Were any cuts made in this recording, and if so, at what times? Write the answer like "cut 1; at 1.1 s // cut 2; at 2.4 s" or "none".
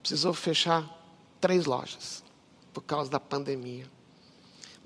none